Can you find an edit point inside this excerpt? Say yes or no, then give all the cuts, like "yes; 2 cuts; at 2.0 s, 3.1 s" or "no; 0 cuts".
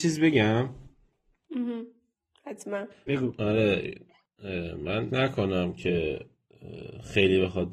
yes; 2 cuts; at 3.1 s, 5.1 s